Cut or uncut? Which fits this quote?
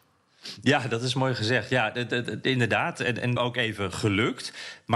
cut